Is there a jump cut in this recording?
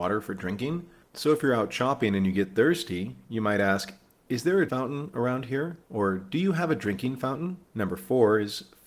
yes; 4 cuts; at 1.0 s, 4.7 s, 5.8 s, 7.6 s

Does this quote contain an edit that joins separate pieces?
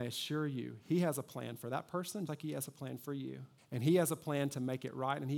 yes; 2 cuts; at 2.3 s, 3.6 s

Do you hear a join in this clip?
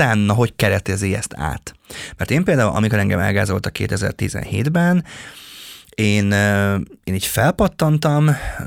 no; 0 cuts

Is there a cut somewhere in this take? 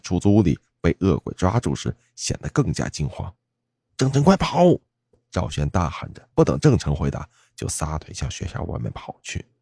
yes; 2 cuts; at 3.4 s, 6.3 s

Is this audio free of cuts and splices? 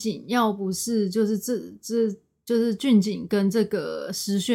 yes; 0 cuts

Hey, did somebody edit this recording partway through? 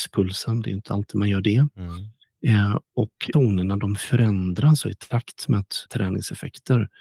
yes; 4 cuts; at 2.2 s, 3.3 s, 4.8 s, 5.9 s

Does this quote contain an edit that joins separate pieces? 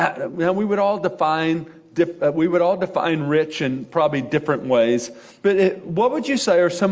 no; 0 cuts

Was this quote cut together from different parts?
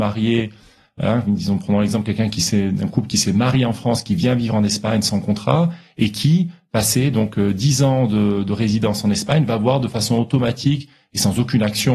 no; 0 cuts

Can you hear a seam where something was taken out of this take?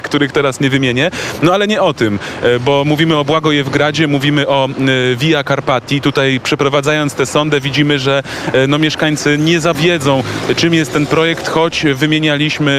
yes; 1 cut; at 9.7 s

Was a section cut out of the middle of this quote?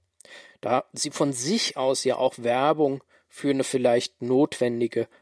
no; 0 cuts

